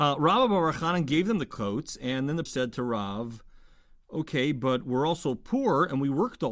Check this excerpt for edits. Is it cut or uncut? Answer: cut